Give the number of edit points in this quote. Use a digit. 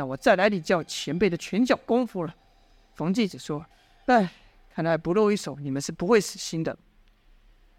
1